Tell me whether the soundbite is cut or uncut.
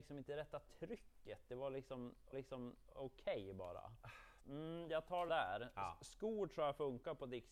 cut